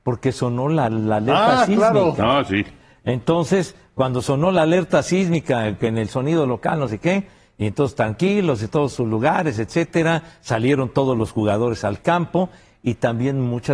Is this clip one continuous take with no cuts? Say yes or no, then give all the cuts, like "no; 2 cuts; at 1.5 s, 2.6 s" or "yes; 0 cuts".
yes; 0 cuts